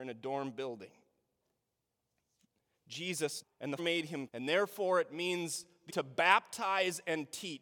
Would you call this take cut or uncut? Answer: cut